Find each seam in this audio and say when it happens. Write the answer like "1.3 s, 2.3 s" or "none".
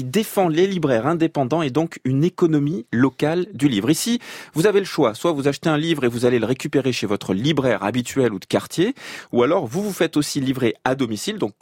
none